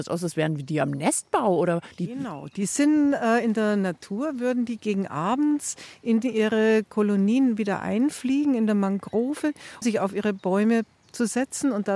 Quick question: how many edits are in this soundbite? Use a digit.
2